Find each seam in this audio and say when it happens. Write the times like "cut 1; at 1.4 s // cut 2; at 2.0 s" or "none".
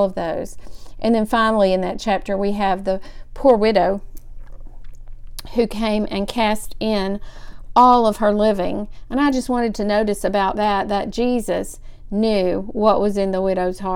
none